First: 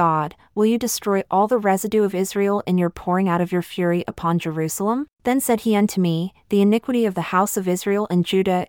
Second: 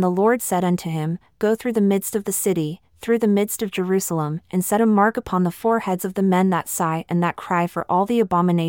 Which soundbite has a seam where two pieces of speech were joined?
first; 1 cut; at 5.1 s

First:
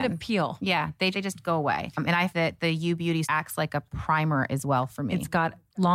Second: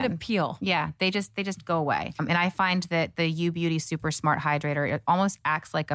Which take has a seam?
first; 3 cuts; at 1.1 s, 2.3 s, 3.2 s

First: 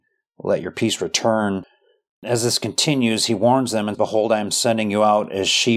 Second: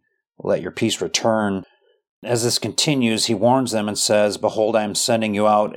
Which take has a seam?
first; 1 cut; at 3.9 s

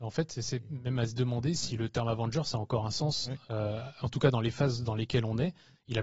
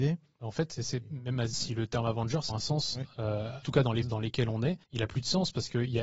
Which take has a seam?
second; 5 cuts; at 1.5 s, 2.5 s, 3.6 s, 4.0 s, 4.8 s

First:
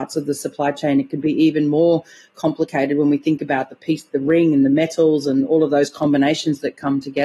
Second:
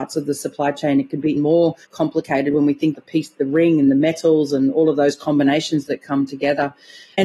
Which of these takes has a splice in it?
second; 3 cuts; at 1.4 s, 1.8 s, 2.9 s

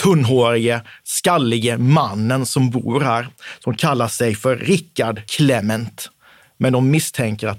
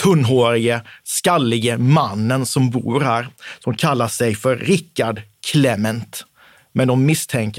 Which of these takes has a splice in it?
first; 1 cut; at 5.3 s

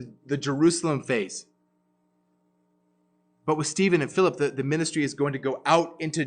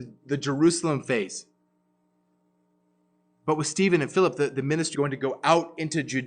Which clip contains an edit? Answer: second; 1 cut; at 4.9 s

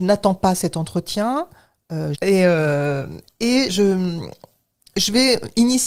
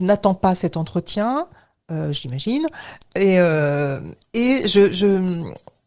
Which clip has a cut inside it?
first; 2 cuts; at 2.1 s, 3.7 s

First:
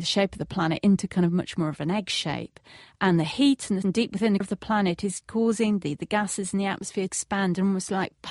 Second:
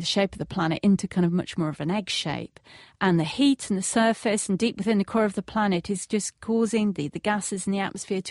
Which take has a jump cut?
first; 4 cuts; at 3.8 s, 4.4 s, 5.2 s, 7.1 s

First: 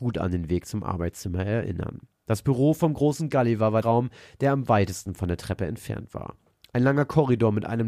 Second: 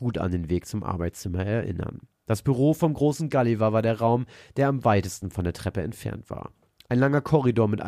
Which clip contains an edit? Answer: first; 1 cut; at 3.8 s

